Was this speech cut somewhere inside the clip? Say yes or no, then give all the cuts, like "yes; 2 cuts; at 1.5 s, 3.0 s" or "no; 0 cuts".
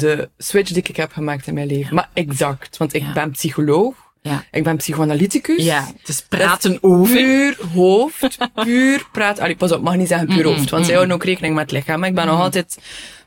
no; 0 cuts